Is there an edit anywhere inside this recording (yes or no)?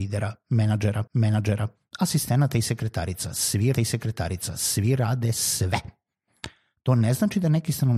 yes